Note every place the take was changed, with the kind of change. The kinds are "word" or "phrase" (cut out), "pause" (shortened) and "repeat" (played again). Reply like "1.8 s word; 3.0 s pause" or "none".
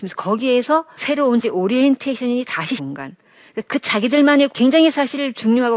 1.0 s word; 1.4 s word; 2.8 s word; 4.5 s word